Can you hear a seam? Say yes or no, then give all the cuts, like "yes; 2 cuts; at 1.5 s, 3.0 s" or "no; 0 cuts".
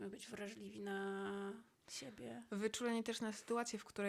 yes; 1 cut; at 1.7 s